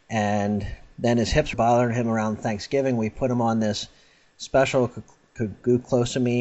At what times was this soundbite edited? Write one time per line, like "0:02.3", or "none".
0:01.5